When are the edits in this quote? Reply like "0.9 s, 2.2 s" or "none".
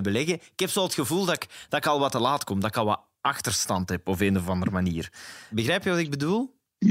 none